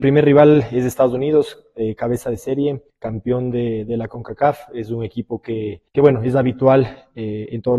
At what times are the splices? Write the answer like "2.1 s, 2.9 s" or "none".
2.9 s, 5.9 s